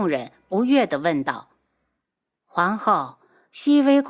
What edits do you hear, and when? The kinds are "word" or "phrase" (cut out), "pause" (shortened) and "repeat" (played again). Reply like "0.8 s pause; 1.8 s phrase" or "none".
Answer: none